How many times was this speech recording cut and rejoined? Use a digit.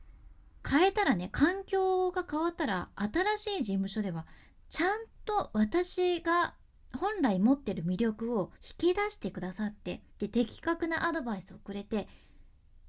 2